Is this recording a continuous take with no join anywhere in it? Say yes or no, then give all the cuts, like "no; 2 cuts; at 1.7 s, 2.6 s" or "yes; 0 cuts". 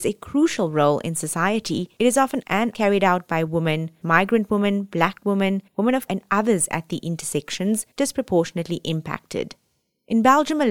no; 6 cuts; at 2.4 s, 2.7 s, 4.0 s, 5.7 s, 6.1 s, 7.9 s